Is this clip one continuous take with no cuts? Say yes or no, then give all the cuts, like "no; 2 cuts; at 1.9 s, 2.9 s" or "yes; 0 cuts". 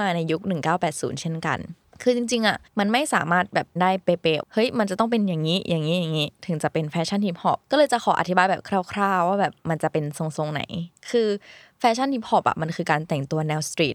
no; 5 cuts; at 1.8 s, 2.7 s, 3.8 s, 4.4 s, 7.6 s